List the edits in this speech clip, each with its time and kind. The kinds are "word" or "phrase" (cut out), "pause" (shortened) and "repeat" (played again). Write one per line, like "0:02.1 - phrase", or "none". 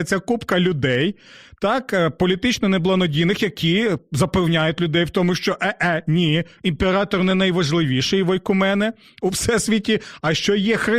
none